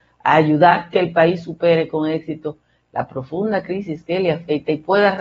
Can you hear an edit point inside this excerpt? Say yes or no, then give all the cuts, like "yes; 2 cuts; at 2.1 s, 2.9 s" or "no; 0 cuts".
no; 0 cuts